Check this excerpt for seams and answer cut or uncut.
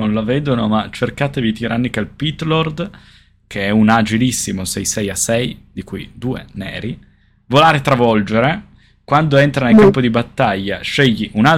uncut